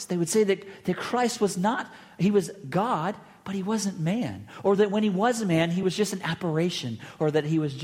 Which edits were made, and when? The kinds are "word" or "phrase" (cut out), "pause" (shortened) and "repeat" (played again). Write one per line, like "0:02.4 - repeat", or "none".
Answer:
none